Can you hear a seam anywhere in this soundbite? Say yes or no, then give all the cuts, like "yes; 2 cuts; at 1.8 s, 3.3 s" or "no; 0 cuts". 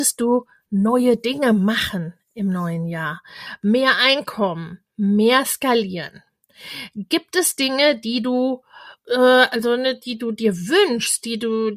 no; 0 cuts